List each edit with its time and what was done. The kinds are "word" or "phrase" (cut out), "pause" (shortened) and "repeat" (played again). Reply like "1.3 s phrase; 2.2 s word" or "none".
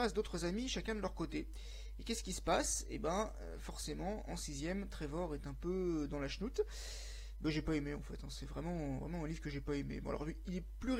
none